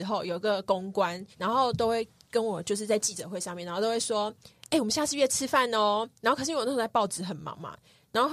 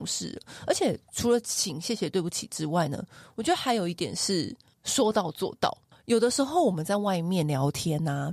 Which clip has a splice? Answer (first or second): first